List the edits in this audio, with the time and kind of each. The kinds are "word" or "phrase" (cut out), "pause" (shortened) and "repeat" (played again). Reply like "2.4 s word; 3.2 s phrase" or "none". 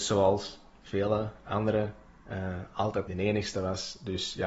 2.2 s pause; 3.1 s phrase